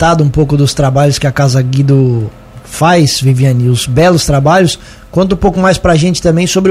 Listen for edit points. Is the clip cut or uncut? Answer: uncut